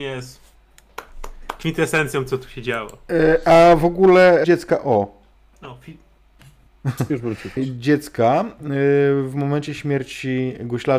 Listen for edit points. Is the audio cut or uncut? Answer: cut